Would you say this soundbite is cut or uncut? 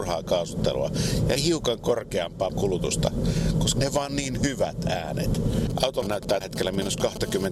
cut